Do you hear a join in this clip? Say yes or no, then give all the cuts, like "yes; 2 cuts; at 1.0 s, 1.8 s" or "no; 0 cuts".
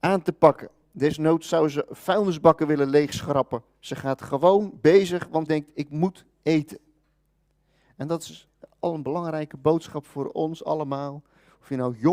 yes; 1 cut; at 5.5 s